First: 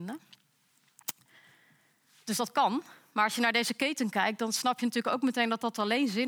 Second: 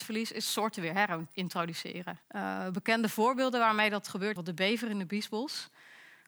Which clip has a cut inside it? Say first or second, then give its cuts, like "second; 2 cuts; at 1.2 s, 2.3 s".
second; 2 cuts; at 2.2 s, 4.4 s